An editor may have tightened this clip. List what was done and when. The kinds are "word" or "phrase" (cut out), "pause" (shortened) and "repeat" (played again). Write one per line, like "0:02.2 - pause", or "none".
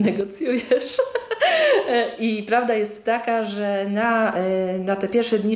none